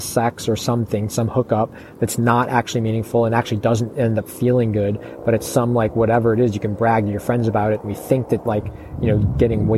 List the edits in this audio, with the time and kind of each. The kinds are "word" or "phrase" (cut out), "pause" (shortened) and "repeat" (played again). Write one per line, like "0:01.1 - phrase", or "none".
none

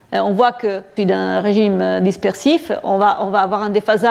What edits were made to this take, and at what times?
0:01.0 - phrase

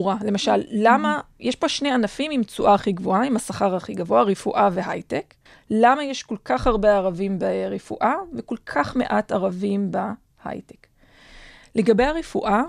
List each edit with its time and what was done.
0:05.5 - pause

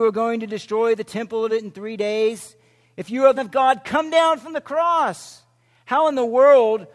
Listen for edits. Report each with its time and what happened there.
0:01.5 - word
0:03.4 - word

